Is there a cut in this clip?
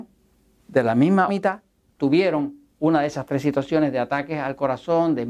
yes; 2 cuts; at 1.3 s, 1.9 s

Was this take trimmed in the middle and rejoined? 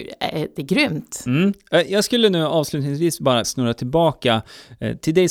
yes; 1 cut; at 3.4 s

